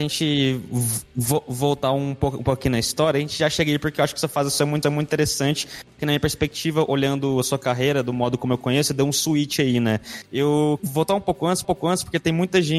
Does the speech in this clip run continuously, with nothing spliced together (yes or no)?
no